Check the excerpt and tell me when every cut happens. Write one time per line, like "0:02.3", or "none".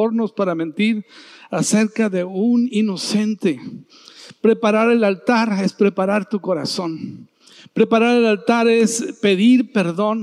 none

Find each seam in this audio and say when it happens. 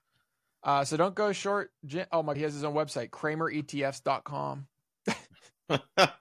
0:02.3

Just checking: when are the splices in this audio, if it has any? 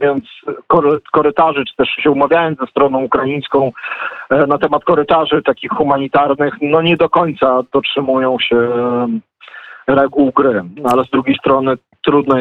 none

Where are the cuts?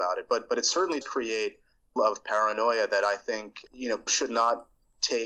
0:01.0
0:02.0
0:03.7
0:04.1

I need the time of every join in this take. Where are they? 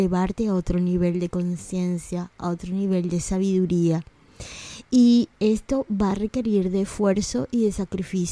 none

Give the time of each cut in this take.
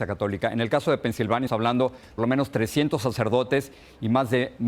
0:01.5
0:02.2

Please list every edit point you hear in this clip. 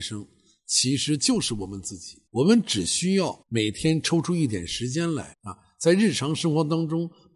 0:02.3
0:03.4
0:05.3

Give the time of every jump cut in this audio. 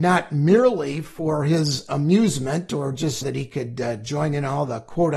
0:03.2

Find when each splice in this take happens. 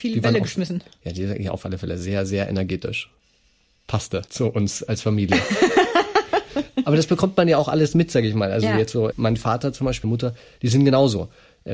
0:04.3
0:09.1
0:10.0

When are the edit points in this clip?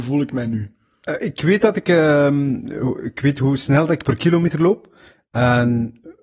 none

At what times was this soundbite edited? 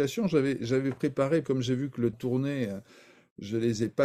0:01.4
0:02.1

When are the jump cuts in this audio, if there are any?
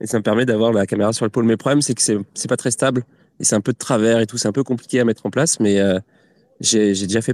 none

